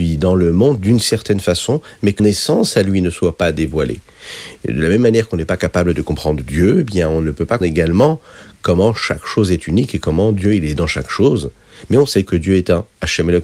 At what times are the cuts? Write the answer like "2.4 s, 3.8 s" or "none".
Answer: 2.2 s, 7.6 s

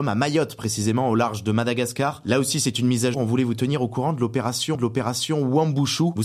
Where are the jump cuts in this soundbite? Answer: 3.1 s, 4.7 s

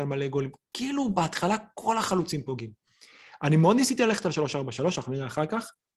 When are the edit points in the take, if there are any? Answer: none

